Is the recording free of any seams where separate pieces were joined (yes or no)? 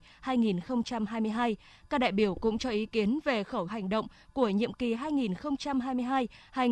no